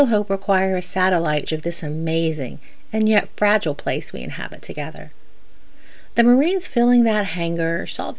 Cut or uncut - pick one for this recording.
cut